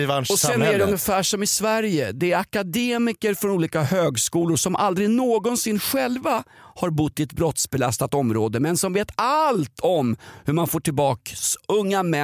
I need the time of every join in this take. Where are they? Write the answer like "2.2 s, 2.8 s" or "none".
none